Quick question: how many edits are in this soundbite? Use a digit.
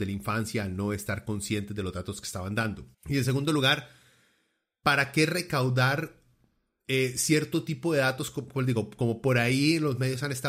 1